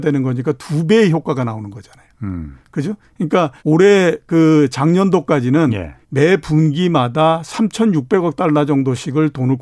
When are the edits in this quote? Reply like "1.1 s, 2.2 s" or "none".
3.6 s, 6.0 s